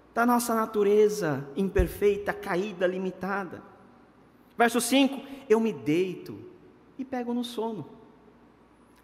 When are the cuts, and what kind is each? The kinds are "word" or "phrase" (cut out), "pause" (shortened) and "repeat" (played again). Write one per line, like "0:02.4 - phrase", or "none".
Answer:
none